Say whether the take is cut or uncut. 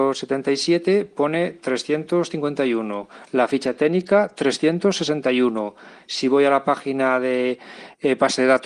uncut